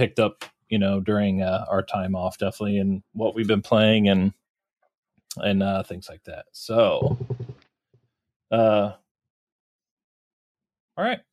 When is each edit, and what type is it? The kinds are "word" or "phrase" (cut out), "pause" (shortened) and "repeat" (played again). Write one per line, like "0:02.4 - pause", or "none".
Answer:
none

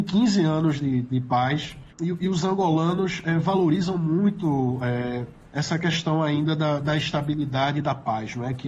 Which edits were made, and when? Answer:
0:01.9 - pause

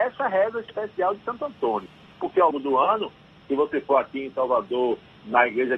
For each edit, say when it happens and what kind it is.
0:02.5 - word

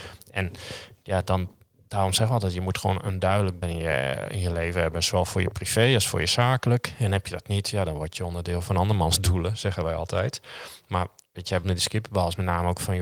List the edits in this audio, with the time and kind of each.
0:03.6 - word
0:11.6 - word

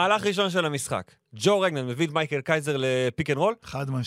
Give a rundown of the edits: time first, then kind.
none

